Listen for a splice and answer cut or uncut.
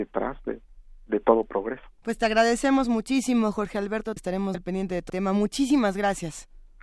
cut